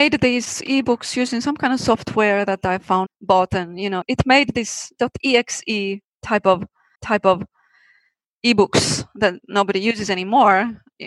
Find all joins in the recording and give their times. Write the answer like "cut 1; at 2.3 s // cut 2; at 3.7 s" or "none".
cut 1; at 3.1 s // cut 2; at 4.0 s // cut 3; at 6.9 s